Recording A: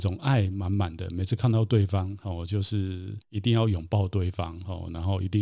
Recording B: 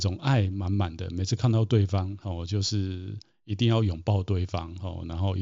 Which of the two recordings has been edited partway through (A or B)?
A